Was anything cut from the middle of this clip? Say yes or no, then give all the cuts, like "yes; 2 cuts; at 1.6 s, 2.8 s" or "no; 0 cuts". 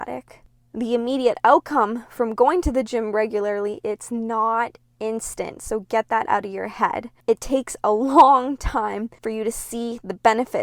yes; 2 cuts; at 7.2 s, 9.2 s